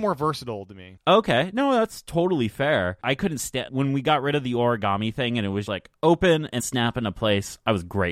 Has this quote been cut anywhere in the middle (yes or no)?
yes